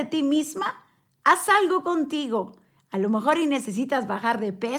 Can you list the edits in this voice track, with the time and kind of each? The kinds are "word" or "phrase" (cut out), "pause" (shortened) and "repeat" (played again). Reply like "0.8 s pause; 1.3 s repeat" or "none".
none